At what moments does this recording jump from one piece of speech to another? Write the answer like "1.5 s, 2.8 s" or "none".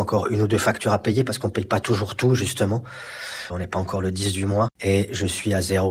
none